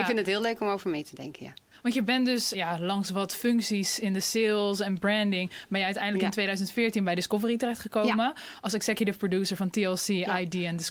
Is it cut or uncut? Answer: cut